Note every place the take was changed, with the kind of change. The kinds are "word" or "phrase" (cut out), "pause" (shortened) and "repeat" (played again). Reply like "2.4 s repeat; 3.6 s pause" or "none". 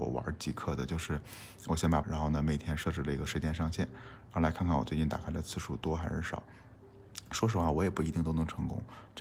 2.0 s phrase